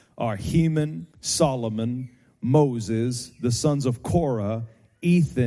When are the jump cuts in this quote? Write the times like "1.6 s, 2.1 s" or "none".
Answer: 1.1 s